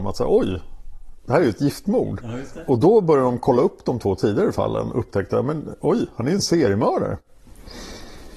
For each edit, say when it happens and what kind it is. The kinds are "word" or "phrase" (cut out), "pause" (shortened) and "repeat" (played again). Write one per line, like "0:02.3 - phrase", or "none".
none